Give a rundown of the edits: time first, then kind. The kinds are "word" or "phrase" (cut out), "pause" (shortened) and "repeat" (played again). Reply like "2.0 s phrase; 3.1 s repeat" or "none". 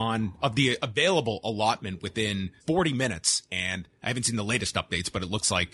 2.6 s pause